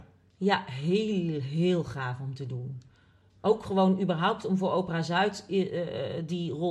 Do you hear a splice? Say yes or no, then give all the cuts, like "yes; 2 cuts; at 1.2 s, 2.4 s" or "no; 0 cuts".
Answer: no; 0 cuts